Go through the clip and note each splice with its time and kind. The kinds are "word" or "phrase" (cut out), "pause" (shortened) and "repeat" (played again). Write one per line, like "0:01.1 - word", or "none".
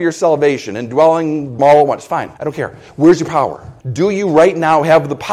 0:01.6 - word
0:02.4 - pause
0:03.8 - pause